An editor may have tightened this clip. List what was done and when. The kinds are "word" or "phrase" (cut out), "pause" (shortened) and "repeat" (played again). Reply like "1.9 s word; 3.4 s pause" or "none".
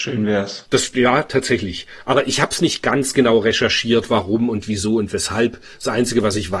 none

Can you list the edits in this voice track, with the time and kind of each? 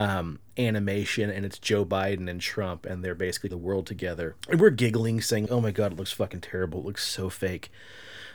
3.5 s phrase; 4.4 s pause; 5.5 s word

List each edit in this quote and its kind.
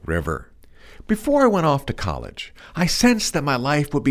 none

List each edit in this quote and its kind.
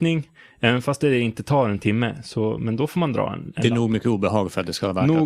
none

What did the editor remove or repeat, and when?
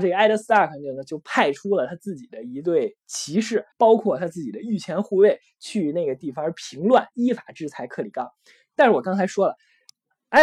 3.7 s pause

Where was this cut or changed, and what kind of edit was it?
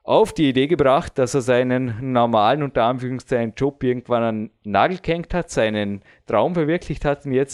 none

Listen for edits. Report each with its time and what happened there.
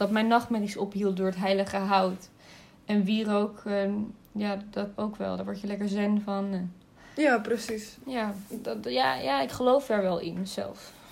4.9 s word

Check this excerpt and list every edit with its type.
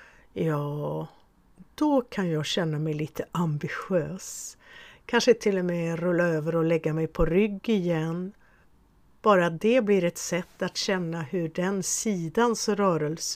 8.6 s pause

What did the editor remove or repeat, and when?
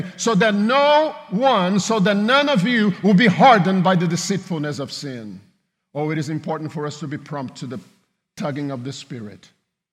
none

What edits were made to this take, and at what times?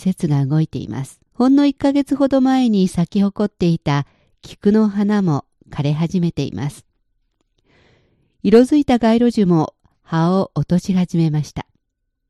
1.3 s pause

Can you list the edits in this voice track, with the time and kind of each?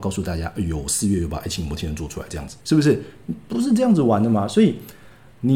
2.6 s pause

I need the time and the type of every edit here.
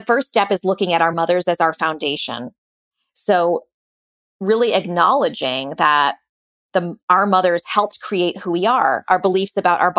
none

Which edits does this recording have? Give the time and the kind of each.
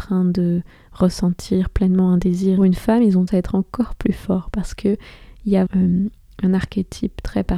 2.6 s phrase; 3.3 s word; 5.7 s word

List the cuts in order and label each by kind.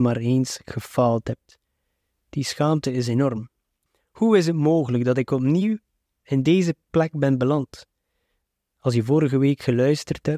none

